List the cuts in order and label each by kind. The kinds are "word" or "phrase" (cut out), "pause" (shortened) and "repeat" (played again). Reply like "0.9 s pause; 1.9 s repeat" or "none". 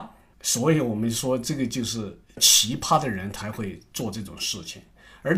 none